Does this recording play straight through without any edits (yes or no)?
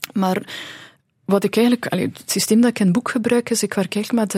yes